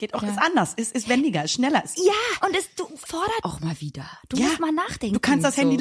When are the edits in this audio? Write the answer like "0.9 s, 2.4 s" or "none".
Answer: 2.4 s, 3.1 s, 3.4 s